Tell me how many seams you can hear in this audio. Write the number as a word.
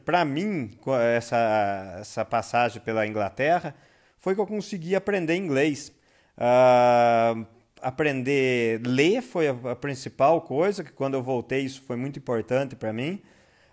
zero